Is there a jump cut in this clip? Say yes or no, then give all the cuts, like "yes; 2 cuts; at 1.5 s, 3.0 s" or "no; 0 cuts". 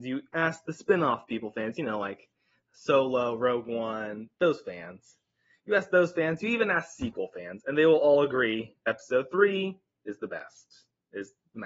no; 0 cuts